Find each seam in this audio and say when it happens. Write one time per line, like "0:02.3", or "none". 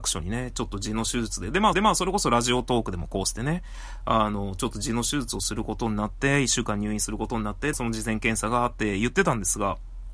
0:01.7
0:07.7